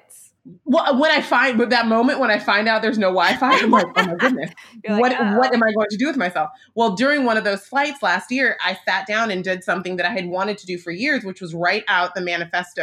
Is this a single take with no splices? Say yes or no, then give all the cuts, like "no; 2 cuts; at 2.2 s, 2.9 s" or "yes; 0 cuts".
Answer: yes; 0 cuts